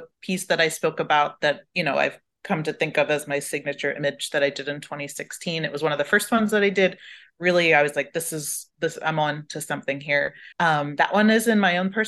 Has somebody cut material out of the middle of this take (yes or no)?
yes